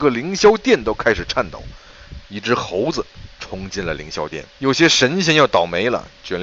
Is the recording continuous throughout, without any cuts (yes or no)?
no